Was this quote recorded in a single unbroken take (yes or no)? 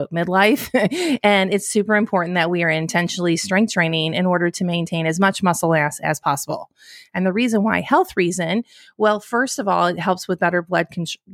yes